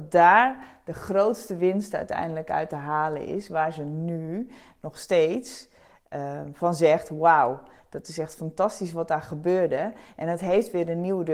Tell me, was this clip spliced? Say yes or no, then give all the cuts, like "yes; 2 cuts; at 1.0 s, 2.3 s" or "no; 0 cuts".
no; 0 cuts